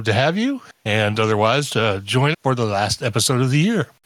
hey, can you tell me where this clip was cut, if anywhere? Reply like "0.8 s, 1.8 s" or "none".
1.7 s, 2.3 s